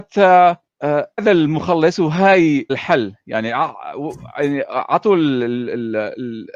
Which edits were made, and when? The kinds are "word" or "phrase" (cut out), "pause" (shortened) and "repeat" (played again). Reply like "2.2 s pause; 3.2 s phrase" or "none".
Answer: 1.2 s word; 2.7 s word